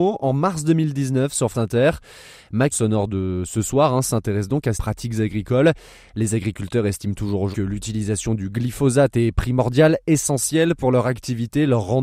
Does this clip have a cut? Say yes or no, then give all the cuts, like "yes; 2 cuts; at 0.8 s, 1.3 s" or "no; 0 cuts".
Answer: yes; 4 cuts; at 1.5 s, 2.7 s, 4.7 s, 7.5 s